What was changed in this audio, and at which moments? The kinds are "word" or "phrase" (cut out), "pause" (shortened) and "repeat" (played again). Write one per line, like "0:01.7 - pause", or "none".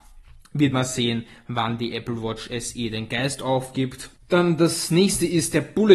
none